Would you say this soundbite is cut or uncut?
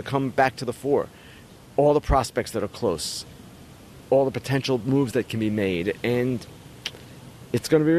uncut